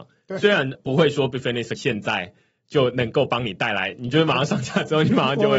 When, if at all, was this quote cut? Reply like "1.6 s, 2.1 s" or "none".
1.8 s